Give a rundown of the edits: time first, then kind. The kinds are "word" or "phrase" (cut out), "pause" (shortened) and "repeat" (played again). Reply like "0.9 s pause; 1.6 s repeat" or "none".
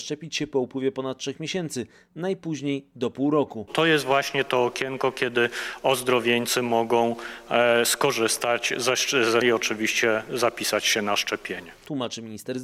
9.4 s word